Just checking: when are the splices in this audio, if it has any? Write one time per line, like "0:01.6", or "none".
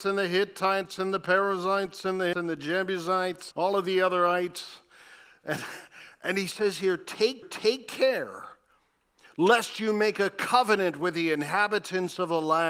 0:02.3
0:03.5
0:07.4